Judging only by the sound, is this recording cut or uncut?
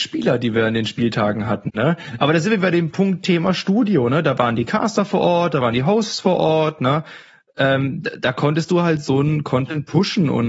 uncut